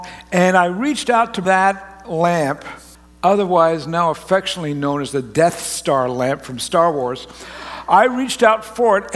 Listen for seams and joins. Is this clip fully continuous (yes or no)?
no